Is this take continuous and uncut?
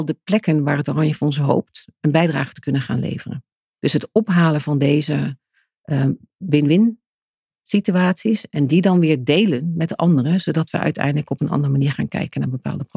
yes; 0 cuts

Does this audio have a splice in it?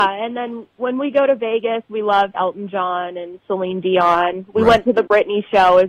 yes; 1 cut; at 2.3 s

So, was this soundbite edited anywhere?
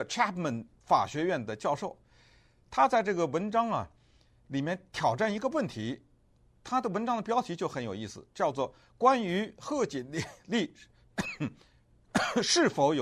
no; 0 cuts

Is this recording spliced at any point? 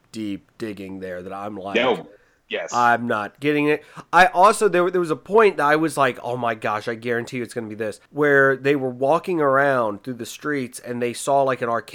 yes; 1 cut; at 8.1 s

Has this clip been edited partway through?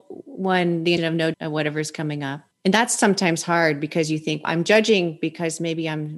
yes; 4 cuts; at 1.0 s, 1.3 s, 2.5 s, 4.4 s

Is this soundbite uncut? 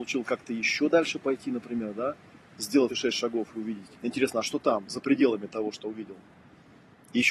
no; 3 cuts; at 2.9 s, 4.0 s, 5.8 s

